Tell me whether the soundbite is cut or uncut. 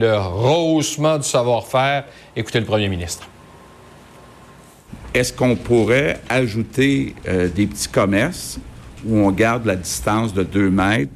uncut